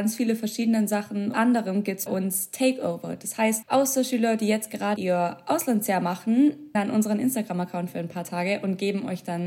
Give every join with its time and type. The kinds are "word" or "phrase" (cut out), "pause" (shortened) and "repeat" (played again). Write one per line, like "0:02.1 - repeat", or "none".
0:01.3 - phrase
0:02.1 - word
0:03.6 - word
0:05.0 - word
0:06.7 - word